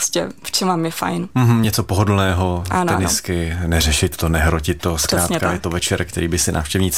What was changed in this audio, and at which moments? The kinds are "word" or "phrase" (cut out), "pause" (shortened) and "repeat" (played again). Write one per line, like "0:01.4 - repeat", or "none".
none